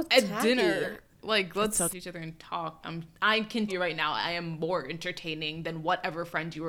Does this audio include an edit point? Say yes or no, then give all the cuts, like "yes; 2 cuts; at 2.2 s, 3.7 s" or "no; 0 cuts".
yes; 3 cuts; at 1.9 s, 2.8 s, 3.7 s